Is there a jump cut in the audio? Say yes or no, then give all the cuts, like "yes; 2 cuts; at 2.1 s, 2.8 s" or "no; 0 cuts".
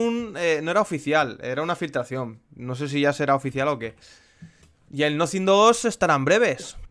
yes; 1 cut; at 4.6 s